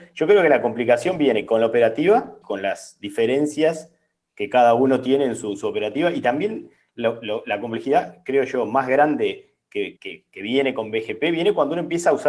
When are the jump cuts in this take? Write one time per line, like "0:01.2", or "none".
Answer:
0:02.4
0:10.0